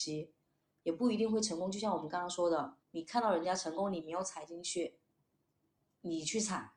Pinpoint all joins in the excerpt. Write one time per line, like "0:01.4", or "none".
0:02.8

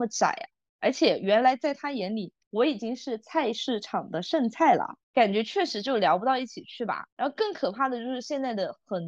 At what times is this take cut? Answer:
0:02.4
0:05.0
0:07.1

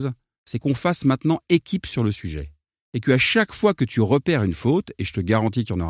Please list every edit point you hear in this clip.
none

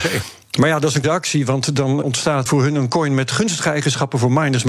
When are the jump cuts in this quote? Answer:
0:01.0
0:02.0
0:02.5

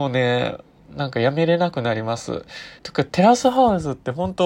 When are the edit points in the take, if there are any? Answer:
0:02.8

